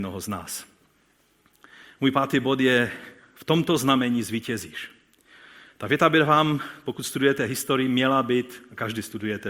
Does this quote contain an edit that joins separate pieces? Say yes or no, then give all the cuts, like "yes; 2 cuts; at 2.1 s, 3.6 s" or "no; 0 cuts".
no; 0 cuts